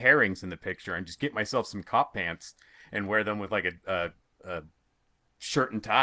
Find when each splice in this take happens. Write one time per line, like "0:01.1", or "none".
none